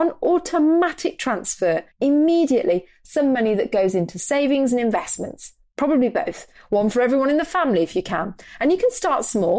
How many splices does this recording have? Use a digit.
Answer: 1